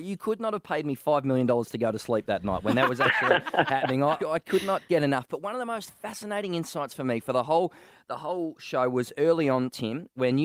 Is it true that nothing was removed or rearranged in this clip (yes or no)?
no